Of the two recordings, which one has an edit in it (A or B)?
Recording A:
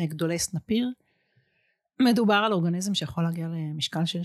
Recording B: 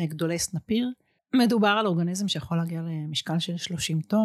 B